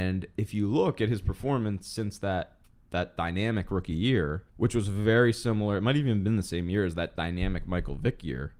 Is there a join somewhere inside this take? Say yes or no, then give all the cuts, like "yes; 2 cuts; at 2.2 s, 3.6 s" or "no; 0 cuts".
yes; 2 cuts; at 2.6 s, 4.5 s